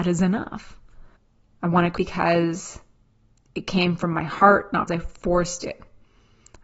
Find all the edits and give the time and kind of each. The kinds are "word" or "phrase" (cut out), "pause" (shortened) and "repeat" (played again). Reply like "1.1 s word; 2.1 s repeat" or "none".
1.2 s pause; 2.0 s word; 4.9 s word

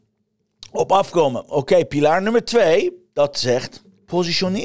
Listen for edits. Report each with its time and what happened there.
none

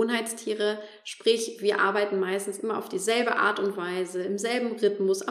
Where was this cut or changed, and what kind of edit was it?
none

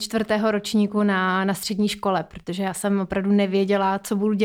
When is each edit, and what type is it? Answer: none

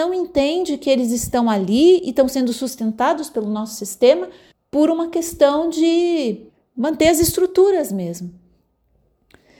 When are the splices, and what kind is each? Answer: 4.5 s pause; 6.5 s pause

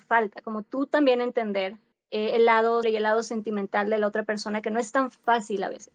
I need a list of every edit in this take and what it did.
1.9 s pause; 2.8 s word

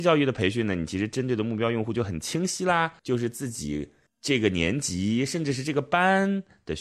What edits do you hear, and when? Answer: 3.0 s pause; 4.1 s pause

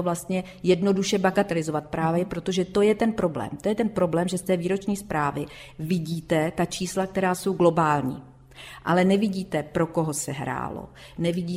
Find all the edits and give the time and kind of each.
none

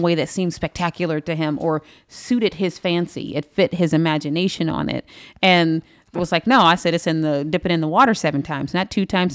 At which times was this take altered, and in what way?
6.1 s word

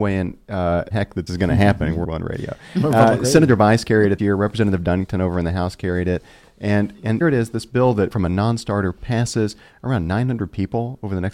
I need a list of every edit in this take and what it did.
0.9 s word; 1.3 s word; 2.0 s word; 4.2 s word; 7.2 s word; 8.1 s word

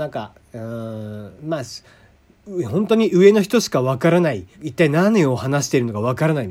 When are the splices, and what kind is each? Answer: 1.4 s pause; 4.5 s pause

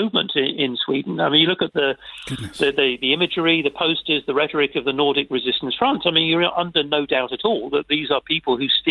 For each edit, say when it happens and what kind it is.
none

